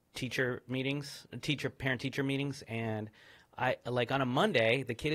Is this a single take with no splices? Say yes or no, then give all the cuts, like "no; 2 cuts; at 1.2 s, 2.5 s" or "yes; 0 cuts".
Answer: yes; 0 cuts